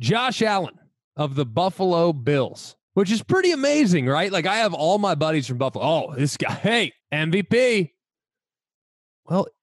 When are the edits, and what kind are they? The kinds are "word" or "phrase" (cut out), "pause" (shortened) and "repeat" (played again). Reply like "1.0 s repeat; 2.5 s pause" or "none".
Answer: 2.8 s pause; 7.0 s pause